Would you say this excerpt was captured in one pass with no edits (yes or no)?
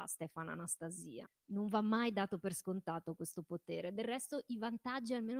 yes